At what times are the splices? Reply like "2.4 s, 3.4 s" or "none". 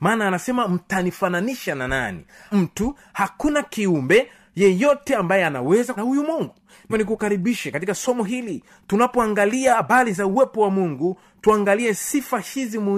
2.5 s, 6.0 s, 6.9 s